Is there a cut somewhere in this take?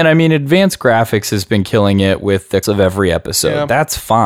yes; 1 cut; at 2.6 s

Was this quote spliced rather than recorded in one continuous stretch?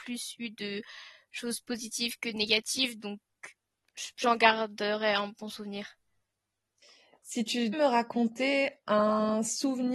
yes; 2 cuts; at 4.1 s, 7.7 s

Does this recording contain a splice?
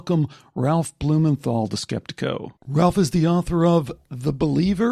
yes; 1 cut; at 2.6 s

